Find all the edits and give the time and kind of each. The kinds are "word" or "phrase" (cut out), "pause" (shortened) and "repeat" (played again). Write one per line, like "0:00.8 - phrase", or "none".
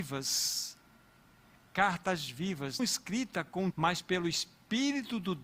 0:02.8 - word
0:03.7 - word